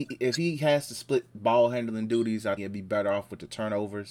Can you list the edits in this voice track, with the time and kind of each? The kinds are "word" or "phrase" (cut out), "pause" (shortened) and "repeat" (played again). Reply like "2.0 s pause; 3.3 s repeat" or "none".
2.6 s word